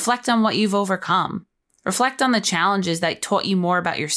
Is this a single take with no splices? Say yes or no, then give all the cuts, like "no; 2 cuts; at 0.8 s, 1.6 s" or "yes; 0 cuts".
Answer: yes; 0 cuts